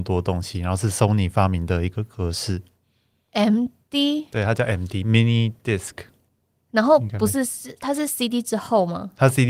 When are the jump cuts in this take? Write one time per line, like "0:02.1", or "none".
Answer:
none